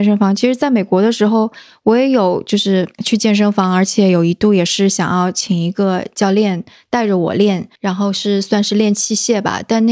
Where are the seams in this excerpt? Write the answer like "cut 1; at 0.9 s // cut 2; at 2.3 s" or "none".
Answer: cut 1; at 2.9 s // cut 2; at 7.8 s